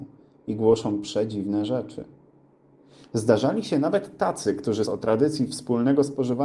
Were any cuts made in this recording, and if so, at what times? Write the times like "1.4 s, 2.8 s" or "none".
4.9 s